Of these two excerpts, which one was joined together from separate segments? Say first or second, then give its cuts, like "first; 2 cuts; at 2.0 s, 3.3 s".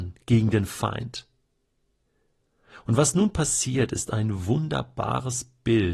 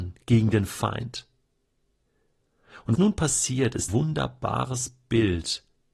second; 2 cuts; at 3.0 s, 3.9 s